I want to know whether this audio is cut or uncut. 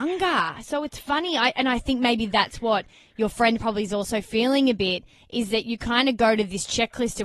uncut